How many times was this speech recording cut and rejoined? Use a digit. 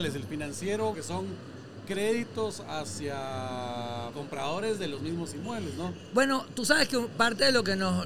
2